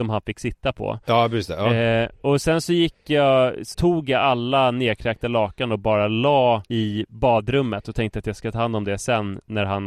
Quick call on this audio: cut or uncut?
cut